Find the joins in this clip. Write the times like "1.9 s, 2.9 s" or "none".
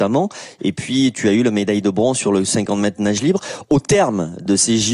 none